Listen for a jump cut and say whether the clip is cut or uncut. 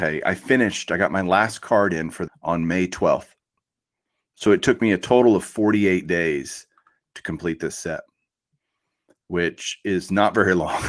cut